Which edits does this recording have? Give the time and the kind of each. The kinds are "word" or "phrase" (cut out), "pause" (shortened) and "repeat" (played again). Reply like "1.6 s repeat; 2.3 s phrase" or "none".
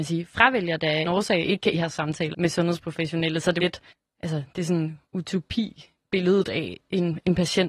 1.0 s phrase; 1.7 s phrase; 2.3 s word; 3.6 s phrase; 3.9 s pause; 5.0 s pause

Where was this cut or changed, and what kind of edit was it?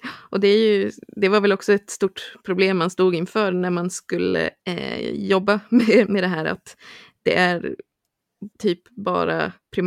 4.6 s pause; 8.5 s pause

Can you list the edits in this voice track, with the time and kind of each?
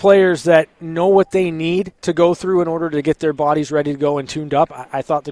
2.0 s pause

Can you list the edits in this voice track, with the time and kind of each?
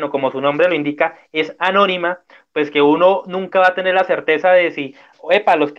none

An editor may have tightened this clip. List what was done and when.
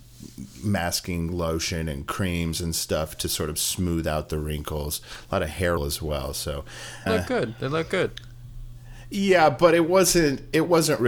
5.8 s word; 7.1 s word

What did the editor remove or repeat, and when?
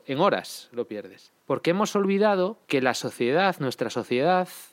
1.4 s pause; 2.6 s pause

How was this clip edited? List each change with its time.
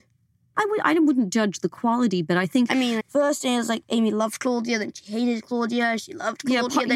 3.0 s word

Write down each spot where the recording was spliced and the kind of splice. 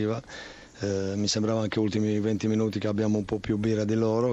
none

